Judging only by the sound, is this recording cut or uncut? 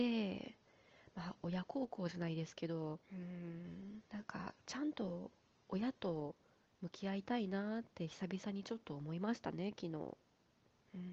cut